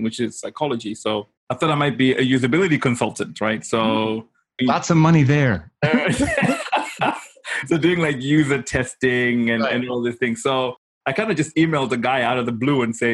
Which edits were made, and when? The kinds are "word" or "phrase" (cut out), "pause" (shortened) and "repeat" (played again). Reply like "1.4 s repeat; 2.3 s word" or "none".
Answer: 1.4 s pause